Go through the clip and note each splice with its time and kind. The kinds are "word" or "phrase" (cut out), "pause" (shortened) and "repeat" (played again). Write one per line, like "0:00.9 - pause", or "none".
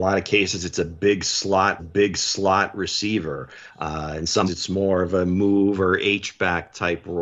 0:01.8 - repeat
0:04.5 - word